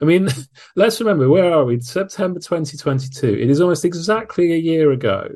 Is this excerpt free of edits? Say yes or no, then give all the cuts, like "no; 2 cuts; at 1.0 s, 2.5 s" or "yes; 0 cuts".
yes; 0 cuts